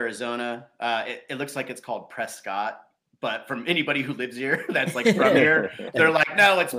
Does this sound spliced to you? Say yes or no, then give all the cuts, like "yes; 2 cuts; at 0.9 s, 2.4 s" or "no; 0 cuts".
no; 0 cuts